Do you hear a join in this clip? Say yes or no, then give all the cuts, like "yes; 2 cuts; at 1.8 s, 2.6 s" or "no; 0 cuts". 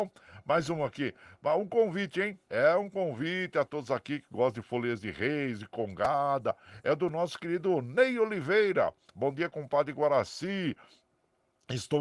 no; 0 cuts